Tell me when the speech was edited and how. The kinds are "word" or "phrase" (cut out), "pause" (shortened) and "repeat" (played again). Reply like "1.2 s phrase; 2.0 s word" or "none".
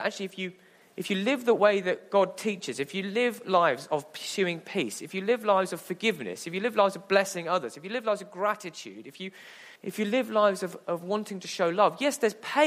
9.8 s pause